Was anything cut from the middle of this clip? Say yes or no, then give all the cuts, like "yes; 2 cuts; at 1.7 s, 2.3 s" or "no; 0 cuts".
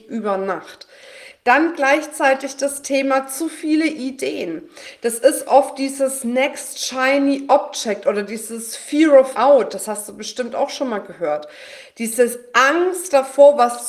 yes; 1 cut; at 9.3 s